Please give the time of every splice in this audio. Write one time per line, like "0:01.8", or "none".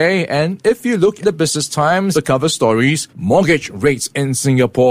0:01.2
0:02.1
0:03.1